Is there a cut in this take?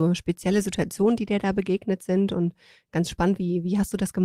no; 0 cuts

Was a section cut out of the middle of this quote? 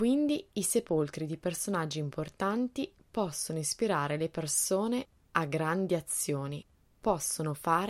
no; 0 cuts

